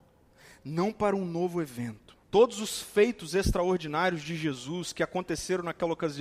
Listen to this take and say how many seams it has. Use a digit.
1